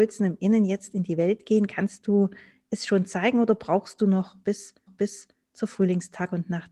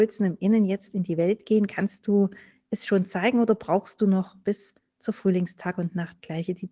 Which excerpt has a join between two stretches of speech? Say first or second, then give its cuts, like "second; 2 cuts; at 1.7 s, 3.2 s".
first; 1 cut; at 4.9 s